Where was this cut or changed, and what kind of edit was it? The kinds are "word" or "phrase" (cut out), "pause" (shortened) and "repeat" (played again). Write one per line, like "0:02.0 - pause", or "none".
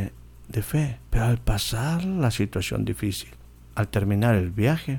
0:01.1 - pause